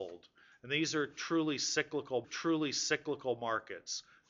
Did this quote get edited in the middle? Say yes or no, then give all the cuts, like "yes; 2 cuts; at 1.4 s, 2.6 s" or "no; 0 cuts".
yes; 1 cut; at 2.2 s